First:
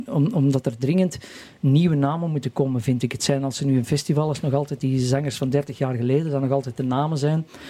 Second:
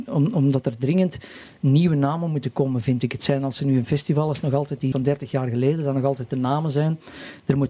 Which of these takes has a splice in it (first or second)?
second